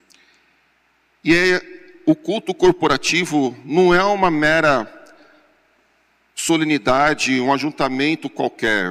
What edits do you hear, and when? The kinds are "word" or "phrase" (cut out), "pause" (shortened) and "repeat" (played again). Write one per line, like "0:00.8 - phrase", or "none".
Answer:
none